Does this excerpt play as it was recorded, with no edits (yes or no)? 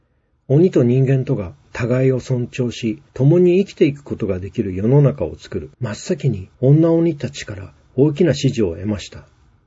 no